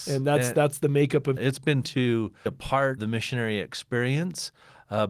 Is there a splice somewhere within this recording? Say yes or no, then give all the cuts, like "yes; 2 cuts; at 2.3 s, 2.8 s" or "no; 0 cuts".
yes; 4 cuts; at 1.4 s, 1.8 s, 2.5 s, 3.0 s